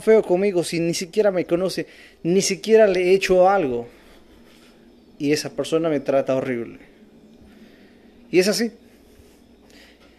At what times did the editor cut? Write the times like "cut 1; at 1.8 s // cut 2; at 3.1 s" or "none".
none